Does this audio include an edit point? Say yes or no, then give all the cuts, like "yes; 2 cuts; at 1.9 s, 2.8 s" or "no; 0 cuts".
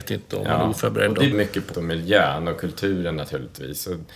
yes; 2 cuts; at 1.3 s, 1.7 s